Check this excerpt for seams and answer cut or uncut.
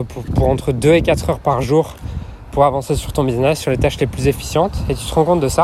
uncut